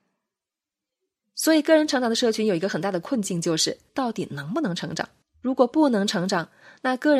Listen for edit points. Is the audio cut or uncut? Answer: cut